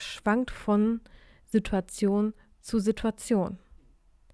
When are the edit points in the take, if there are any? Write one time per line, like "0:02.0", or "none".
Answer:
none